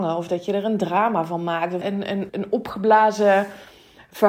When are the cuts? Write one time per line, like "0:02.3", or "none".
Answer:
0:01.8
0:02.3